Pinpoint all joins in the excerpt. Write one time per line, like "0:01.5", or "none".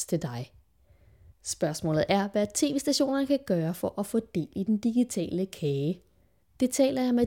none